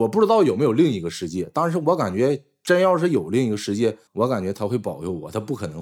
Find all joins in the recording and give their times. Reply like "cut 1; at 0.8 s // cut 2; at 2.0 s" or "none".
cut 1; at 4.1 s